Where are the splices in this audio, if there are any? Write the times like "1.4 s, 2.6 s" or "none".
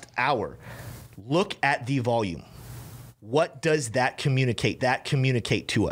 4.8 s